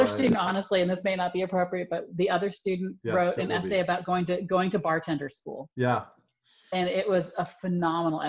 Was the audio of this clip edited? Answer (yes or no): yes